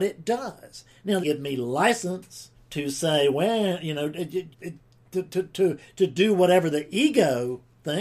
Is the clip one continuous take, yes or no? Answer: no